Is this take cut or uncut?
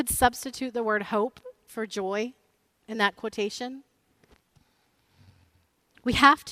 uncut